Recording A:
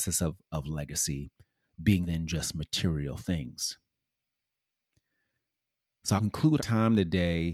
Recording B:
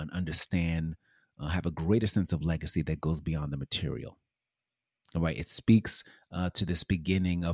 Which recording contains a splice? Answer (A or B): A